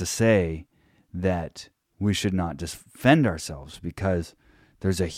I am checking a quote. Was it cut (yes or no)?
no